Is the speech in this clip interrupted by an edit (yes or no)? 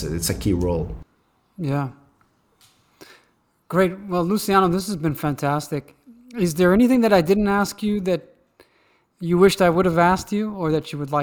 no